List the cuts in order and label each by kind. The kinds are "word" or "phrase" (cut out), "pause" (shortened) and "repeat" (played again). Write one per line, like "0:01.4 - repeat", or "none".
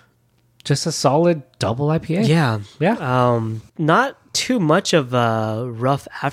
0:03.7 - pause